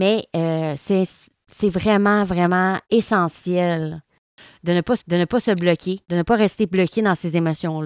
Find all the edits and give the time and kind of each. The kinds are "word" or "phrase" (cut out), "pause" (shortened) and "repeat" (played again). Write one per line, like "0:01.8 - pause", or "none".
0:02.8 - pause
0:05.0 - repeat
0:06.0 - pause